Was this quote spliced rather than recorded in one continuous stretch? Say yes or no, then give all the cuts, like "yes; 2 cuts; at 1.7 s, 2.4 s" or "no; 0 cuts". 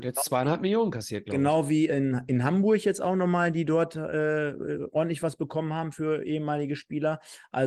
no; 0 cuts